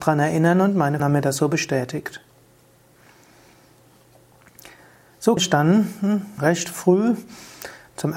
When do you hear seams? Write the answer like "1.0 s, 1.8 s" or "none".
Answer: 1.0 s, 5.4 s, 6.4 s